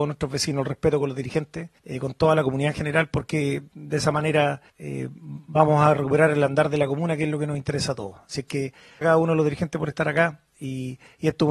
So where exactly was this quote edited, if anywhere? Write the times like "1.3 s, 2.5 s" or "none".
1.8 s, 4.7 s, 9.0 s

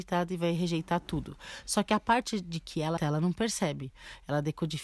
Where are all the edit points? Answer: 3.0 s

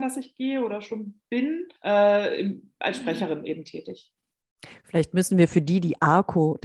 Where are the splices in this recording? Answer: 1.8 s

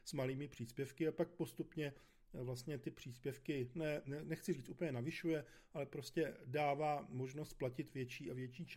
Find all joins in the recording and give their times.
none

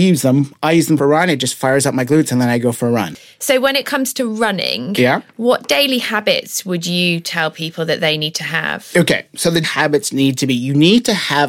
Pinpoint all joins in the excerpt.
1.0 s, 9.6 s

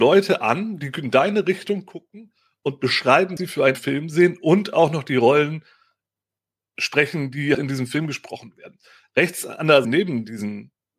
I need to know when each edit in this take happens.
3.4 s, 3.7 s, 7.5 s, 9.8 s

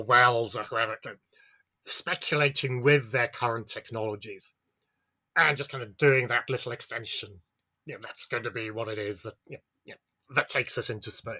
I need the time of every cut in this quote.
none

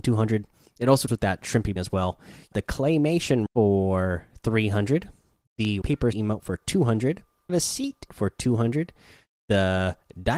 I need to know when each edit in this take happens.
1.1 s, 1.8 s, 2.5 s, 3.5 s, 5.8 s, 6.1 s, 7.5 s, 8.1 s

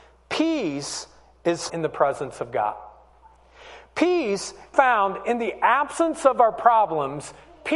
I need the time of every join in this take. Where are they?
1.7 s, 4.7 s

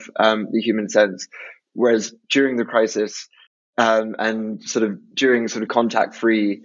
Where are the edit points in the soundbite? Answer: 3.5 s, 5.7 s

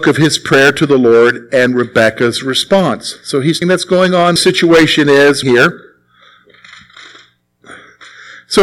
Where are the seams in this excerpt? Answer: 3.6 s, 4.4 s, 5.4 s

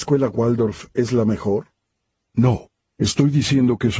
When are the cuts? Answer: none

